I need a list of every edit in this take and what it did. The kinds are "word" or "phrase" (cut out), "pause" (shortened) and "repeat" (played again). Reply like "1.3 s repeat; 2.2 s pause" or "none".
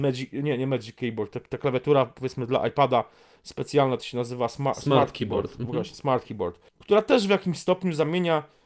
6.7 s pause